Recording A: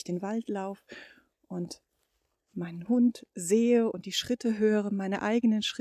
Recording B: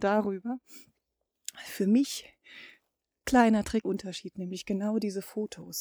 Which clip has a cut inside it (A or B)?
B